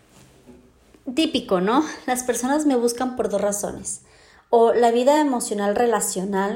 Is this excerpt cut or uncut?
uncut